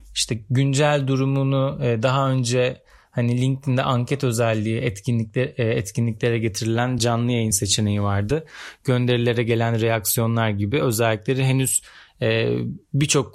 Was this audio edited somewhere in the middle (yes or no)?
no